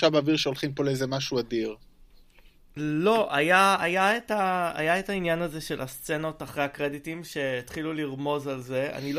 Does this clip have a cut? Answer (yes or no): no